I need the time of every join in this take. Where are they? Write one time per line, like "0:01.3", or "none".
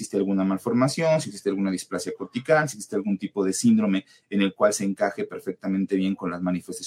none